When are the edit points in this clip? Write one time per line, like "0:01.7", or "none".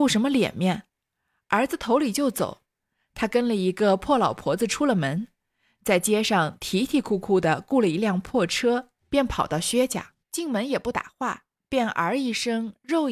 0:09.0
0:10.2